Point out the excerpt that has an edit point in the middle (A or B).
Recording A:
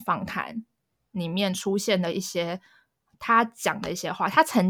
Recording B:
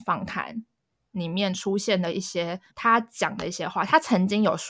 B